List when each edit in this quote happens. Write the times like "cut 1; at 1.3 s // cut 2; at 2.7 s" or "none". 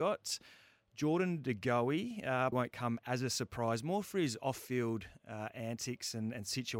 cut 1; at 2.5 s